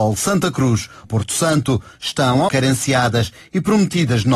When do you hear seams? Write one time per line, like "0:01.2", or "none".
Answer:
0:01.0
0:02.5